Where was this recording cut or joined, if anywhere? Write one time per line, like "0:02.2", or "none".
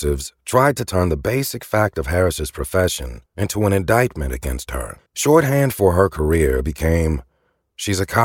0:03.3
0:05.1